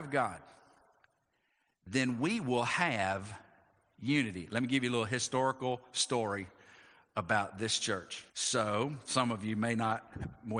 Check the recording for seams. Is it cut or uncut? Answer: cut